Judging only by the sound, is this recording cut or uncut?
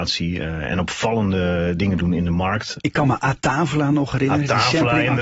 uncut